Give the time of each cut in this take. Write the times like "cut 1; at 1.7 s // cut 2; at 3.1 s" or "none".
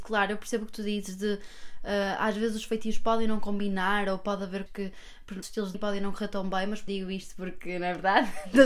cut 1; at 4.7 s // cut 2; at 5.4 s // cut 3; at 5.7 s // cut 4; at 6.9 s